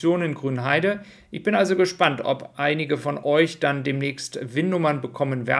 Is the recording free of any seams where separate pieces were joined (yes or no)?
yes